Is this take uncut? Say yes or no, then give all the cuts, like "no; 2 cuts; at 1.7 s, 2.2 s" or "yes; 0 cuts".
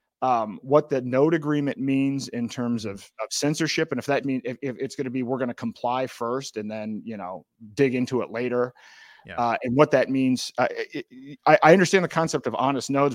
no; 1 cut; at 4.2 s